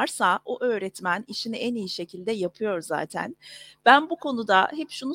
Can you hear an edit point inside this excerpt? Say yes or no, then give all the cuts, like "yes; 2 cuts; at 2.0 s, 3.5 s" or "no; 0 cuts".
no; 0 cuts